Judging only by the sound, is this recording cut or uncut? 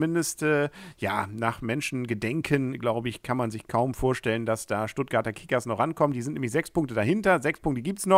uncut